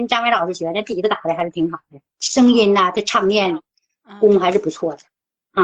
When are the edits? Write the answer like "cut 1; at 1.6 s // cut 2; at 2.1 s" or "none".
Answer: none